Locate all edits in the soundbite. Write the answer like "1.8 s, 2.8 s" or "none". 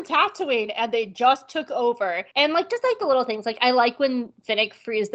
2.3 s